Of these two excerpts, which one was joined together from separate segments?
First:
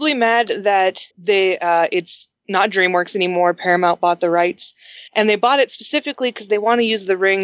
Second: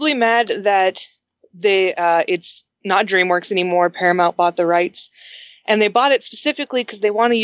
first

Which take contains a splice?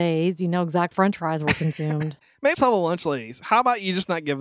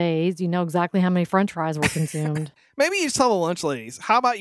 first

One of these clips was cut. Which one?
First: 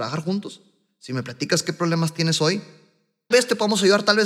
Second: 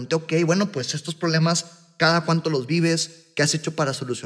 first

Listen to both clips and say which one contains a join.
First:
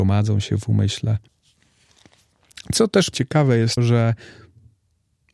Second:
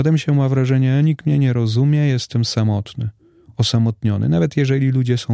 first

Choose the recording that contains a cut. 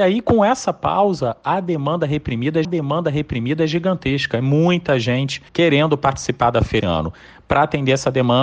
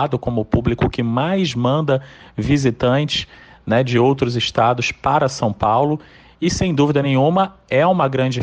first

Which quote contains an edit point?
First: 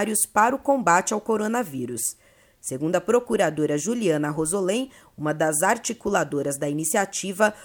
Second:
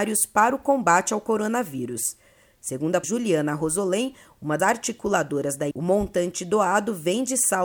second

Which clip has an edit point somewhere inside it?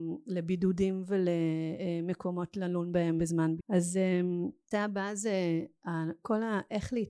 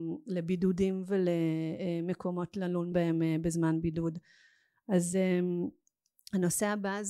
first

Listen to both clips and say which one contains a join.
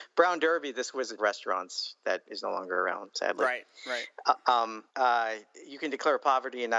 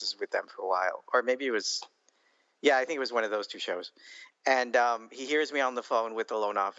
first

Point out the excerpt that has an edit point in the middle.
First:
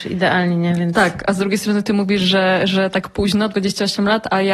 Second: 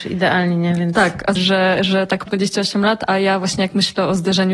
second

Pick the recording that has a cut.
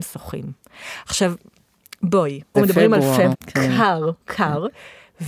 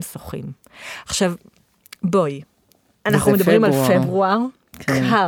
first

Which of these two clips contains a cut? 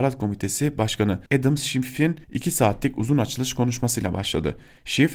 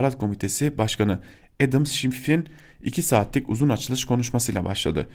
first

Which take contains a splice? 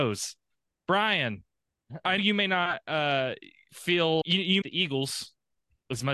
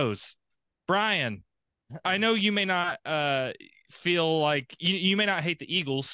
first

